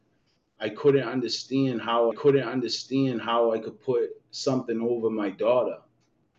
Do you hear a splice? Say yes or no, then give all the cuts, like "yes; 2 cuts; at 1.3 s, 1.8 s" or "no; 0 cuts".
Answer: yes; 1 cut; at 2.1 s